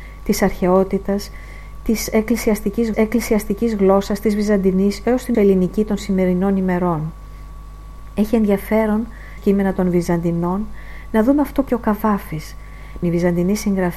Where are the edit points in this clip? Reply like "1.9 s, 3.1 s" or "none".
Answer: 2.9 s, 5.3 s, 9.4 s, 11.7 s, 13.0 s

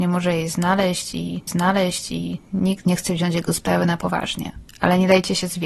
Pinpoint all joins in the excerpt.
1.5 s, 4.7 s

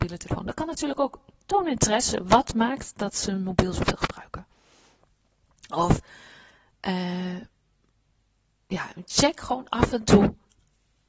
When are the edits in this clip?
none

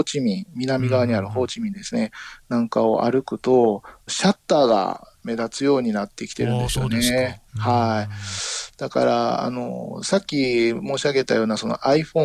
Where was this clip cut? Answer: 4.1 s, 7.5 s

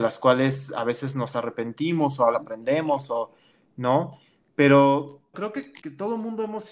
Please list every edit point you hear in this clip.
2.3 s, 5.3 s, 5.8 s

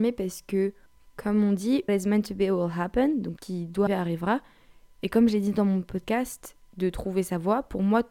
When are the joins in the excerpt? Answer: 1.9 s, 3.4 s, 3.9 s

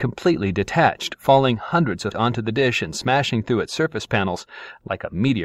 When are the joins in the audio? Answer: 2.1 s

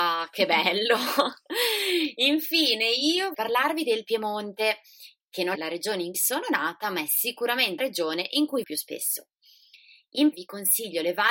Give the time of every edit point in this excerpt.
3.3 s, 5.6 s, 6.1 s, 7.8 s, 8.6 s, 10.3 s

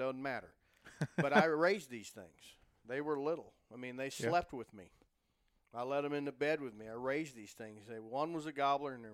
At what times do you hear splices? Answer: none

